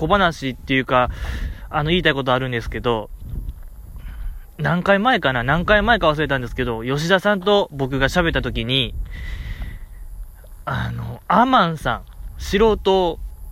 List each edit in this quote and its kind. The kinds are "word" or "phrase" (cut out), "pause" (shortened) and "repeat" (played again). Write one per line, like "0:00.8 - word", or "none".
none